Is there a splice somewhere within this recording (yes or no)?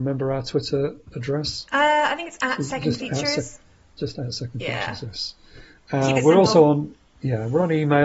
no